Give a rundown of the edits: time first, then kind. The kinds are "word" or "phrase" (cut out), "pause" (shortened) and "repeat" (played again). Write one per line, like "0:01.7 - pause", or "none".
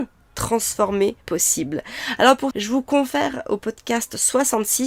0:01.2 - pause
0:02.5 - word